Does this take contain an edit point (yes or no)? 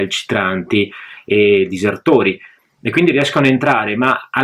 no